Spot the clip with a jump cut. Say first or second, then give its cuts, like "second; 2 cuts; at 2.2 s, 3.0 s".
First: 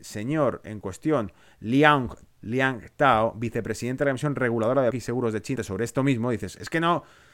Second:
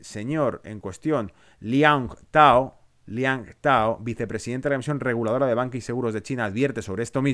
first; 3 cuts; at 2.3 s, 4.9 s, 5.6 s